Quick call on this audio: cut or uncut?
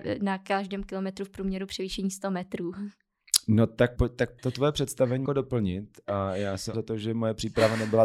cut